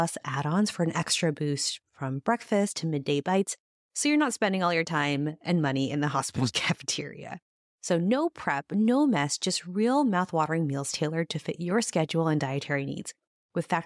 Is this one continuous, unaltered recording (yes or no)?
yes